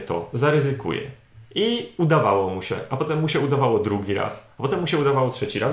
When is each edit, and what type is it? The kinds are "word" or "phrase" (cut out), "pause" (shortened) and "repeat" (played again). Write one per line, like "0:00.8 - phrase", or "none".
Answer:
0:01.5 - pause